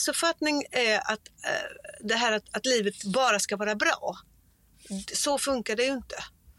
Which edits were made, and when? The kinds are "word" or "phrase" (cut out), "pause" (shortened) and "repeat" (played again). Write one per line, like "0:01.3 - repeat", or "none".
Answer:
none